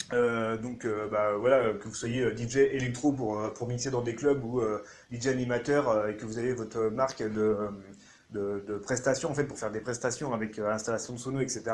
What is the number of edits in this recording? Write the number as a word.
zero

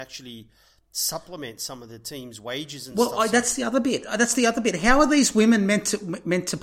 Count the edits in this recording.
zero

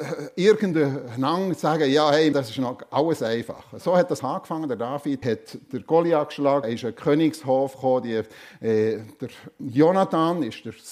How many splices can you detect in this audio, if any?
four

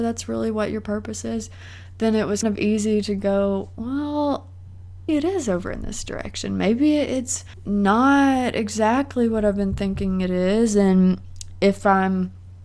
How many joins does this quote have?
two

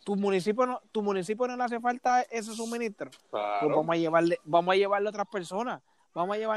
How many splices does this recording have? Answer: zero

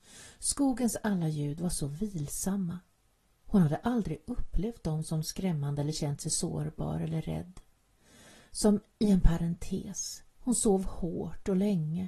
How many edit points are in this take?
one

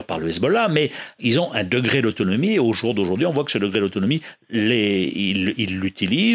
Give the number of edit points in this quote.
one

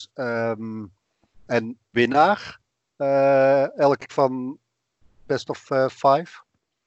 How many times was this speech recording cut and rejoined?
four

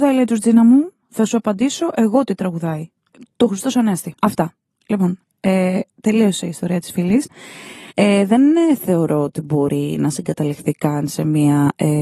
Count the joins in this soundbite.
three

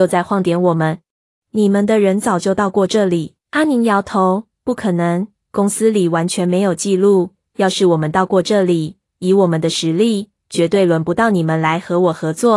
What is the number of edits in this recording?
two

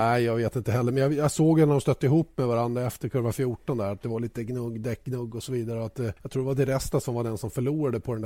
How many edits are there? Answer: one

